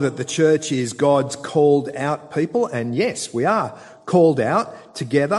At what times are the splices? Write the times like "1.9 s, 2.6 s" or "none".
none